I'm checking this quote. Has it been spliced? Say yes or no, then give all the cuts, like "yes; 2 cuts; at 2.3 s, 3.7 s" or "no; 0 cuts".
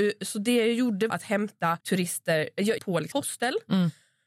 yes; 4 cuts; at 1.1 s, 1.8 s, 2.8 s, 3.1 s